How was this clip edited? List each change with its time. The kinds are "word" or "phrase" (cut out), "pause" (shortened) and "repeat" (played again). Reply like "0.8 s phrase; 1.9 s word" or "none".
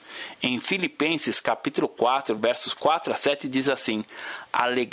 none